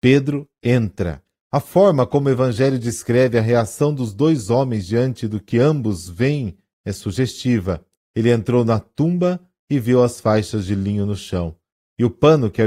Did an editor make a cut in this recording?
yes; 1 cut; at 8.0 s

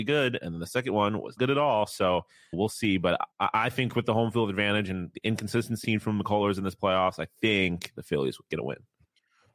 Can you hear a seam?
yes; 5 cuts; at 1.4 s, 2.5 s, 3.3 s, 5.8 s, 7.4 s

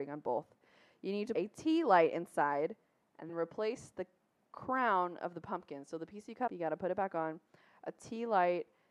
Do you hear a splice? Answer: yes; 3 cuts; at 1.3 s, 3.3 s, 6.5 s

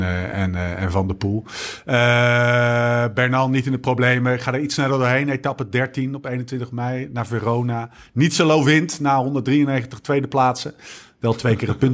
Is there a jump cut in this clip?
no; 0 cuts

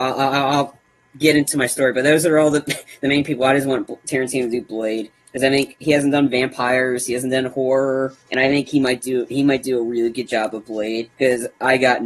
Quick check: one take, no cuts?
no; 2 cuts; at 8.2 s, 11.1 s

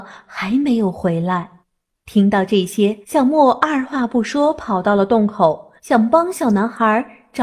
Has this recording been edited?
yes; 3 cuts; at 1.6 s, 3.0 s, 5.8 s

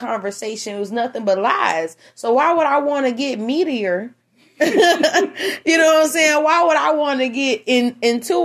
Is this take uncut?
no; 1 cut; at 4.2 s

